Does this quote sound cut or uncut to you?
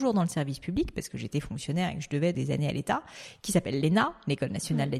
cut